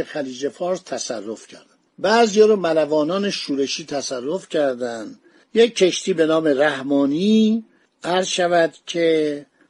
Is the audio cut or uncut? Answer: uncut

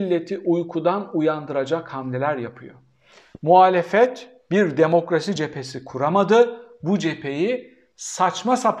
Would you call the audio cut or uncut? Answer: uncut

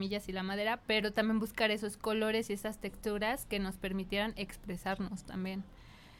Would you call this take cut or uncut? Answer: uncut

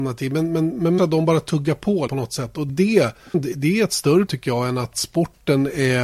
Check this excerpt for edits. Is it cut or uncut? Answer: cut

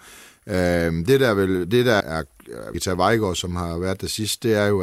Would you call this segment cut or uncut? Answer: cut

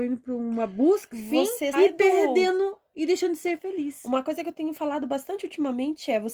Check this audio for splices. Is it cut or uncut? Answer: cut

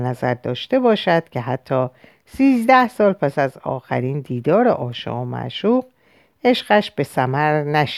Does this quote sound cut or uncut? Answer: uncut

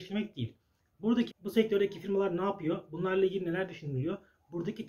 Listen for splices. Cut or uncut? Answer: cut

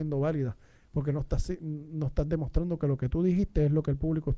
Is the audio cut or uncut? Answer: uncut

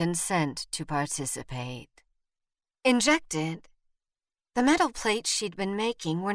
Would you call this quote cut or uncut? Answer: uncut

